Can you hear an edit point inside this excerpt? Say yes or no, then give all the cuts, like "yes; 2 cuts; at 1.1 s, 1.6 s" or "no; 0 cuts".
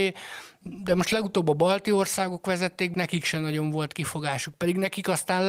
yes; 1 cut; at 2.9 s